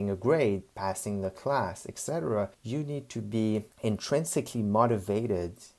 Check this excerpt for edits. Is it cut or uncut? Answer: cut